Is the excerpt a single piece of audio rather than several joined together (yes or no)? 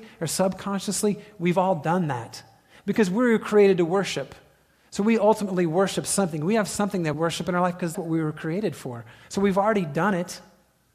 no